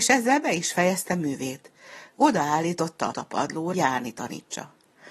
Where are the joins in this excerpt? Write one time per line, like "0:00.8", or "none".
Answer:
0:03.1
0:03.7